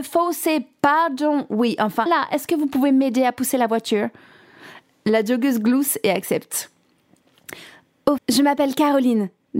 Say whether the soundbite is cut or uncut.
cut